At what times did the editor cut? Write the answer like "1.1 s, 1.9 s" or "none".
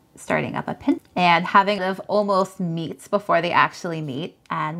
1.0 s, 1.8 s